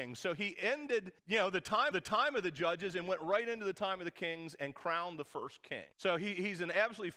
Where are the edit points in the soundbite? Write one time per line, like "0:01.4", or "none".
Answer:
0:01.2
0:01.9
0:05.9